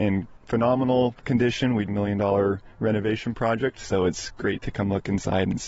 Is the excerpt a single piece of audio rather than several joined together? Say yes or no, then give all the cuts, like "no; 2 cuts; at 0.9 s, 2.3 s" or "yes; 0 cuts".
no; 1 cut; at 1.9 s